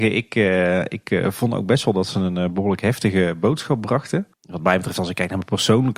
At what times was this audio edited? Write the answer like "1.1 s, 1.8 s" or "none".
4.3 s

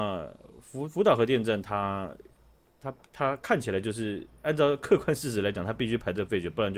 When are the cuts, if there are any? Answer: none

